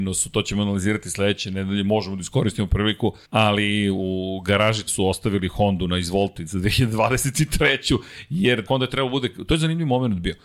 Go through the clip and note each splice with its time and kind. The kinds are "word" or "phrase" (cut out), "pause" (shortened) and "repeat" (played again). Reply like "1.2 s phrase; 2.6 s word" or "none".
3.2 s pause; 4.9 s phrase; 8.7 s word